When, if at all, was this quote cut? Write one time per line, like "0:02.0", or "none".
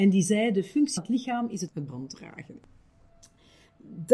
0:01.0
0:01.9